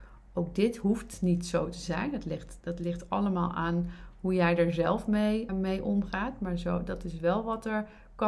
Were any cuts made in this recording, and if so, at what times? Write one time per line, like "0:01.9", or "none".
0:05.5